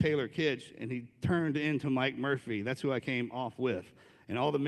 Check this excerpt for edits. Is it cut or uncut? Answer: uncut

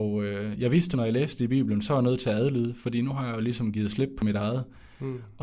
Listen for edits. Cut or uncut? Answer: cut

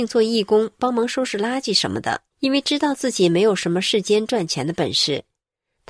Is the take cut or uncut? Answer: cut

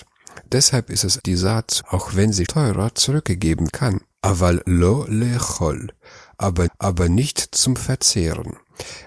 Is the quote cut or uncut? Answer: cut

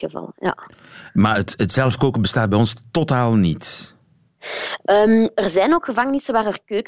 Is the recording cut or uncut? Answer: uncut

